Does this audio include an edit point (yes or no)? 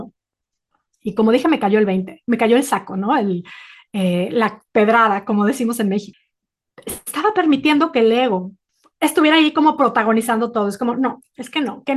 no